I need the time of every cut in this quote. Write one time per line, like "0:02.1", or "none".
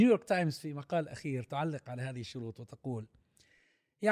none